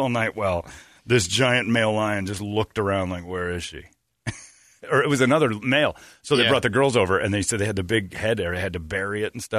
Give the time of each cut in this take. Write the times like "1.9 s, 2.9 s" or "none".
none